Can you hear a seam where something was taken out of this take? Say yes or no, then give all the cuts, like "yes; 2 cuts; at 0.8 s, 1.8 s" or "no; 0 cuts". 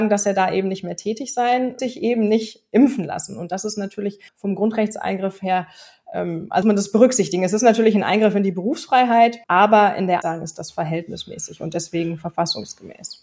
yes; 5 cuts; at 1.8 s, 4.3 s, 6.6 s, 9.4 s, 10.2 s